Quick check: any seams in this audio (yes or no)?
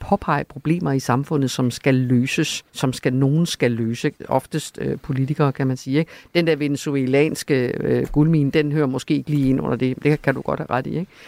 yes